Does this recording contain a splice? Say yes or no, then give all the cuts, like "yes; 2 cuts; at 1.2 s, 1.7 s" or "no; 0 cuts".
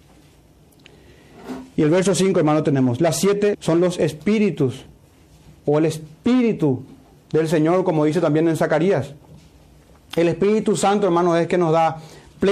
yes; 1 cut; at 3.5 s